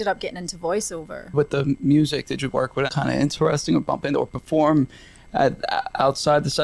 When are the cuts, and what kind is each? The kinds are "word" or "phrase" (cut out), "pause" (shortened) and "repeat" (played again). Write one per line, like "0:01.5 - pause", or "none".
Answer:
0:02.9 - word